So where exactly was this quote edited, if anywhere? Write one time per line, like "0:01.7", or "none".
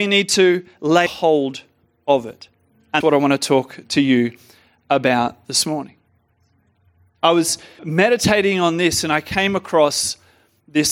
0:01.1
0:03.0
0:07.8